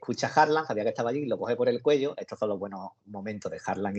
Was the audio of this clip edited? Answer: no; 0 cuts

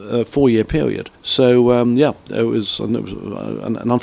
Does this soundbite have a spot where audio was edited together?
yes; 1 cut; at 1.1 s

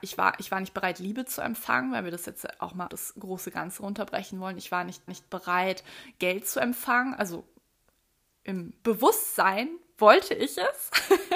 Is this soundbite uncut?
no; 3 cuts; at 2.9 s, 5.1 s, 8.8 s

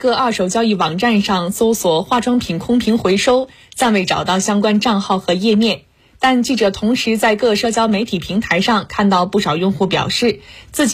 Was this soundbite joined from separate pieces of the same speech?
no; 0 cuts

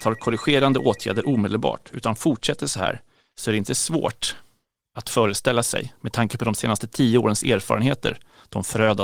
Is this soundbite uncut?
yes; 0 cuts

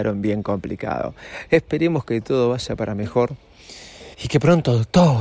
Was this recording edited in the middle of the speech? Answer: yes; 1 cut; at 4.1 s

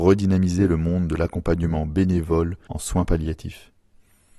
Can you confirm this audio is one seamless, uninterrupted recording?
yes; 0 cuts

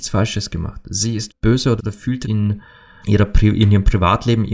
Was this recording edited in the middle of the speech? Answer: yes; 4 cuts; at 1.3 s, 1.8 s, 2.2 s, 3.0 s

